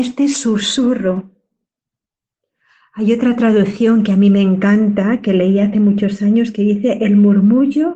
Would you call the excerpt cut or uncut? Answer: uncut